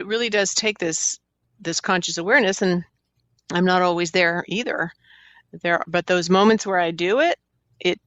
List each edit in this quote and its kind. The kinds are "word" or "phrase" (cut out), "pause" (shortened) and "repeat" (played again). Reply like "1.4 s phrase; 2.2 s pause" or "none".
none